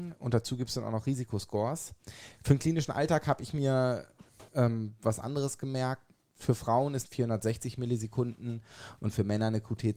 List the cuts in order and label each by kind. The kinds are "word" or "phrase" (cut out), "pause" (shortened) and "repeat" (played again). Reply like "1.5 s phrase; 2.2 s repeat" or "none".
4.5 s pause; 7.1 s phrase